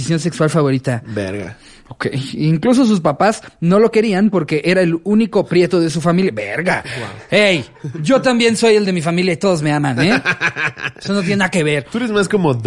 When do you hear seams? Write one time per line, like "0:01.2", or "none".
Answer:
none